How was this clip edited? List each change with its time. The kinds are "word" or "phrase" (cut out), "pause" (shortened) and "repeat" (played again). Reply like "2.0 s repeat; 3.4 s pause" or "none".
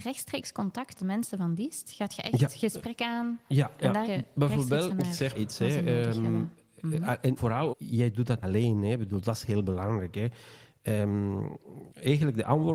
1.0 s word; 4.0 s word; 4.9 s word; 5.3 s word; 7.4 s word; 7.7 s word; 8.4 s word